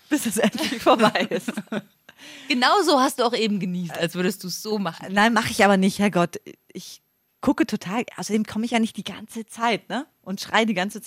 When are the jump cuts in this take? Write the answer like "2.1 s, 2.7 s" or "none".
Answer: none